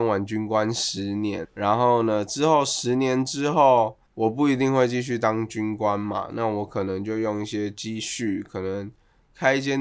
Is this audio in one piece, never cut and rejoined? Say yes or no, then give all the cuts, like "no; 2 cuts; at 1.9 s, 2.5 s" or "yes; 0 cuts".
no; 2 cuts; at 1.4 s, 4.0 s